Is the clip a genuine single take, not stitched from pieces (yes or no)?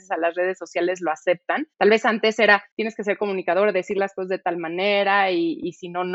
no